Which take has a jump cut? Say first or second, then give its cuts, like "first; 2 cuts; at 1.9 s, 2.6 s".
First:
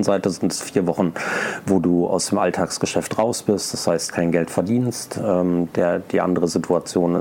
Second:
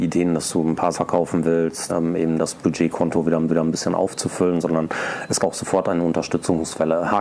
second; 4 cuts; at 0.9 s, 1.9 s, 3.5 s, 5.4 s